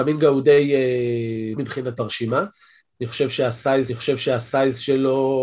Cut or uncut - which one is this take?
cut